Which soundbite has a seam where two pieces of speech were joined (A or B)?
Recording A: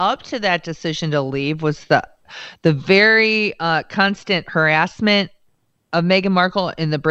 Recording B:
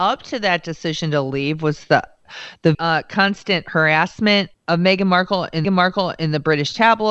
B